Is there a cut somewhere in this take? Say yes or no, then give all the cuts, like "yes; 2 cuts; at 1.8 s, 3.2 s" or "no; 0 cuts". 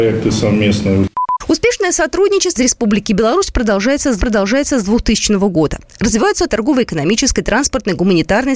yes; 3 cuts; at 2.6 s, 4.2 s, 6.5 s